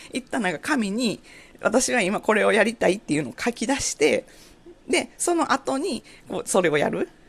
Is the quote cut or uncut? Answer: uncut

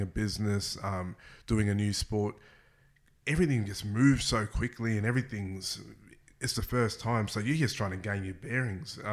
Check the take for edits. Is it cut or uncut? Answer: uncut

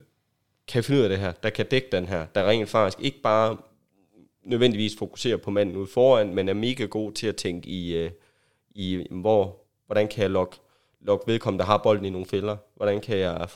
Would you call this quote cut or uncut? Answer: uncut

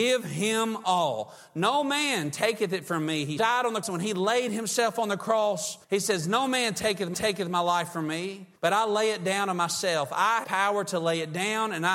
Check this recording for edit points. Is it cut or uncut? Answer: cut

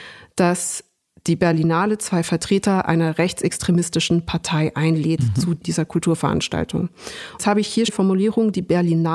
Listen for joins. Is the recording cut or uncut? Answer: cut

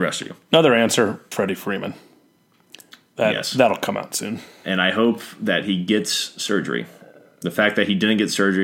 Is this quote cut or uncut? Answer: cut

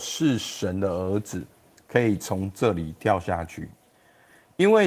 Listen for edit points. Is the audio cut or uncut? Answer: uncut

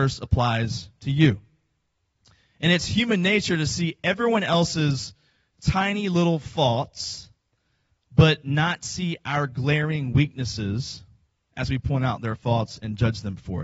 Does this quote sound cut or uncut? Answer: uncut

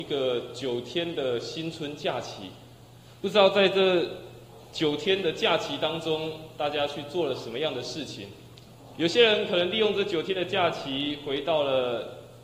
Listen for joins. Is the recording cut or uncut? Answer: uncut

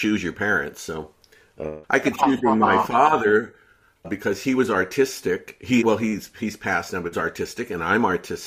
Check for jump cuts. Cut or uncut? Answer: cut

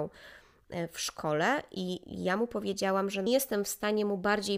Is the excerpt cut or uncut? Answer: cut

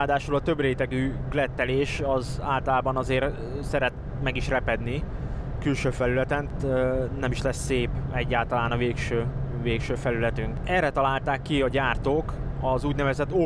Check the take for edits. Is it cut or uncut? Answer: uncut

